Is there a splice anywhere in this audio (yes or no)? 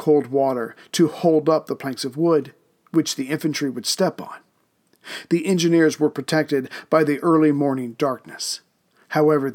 no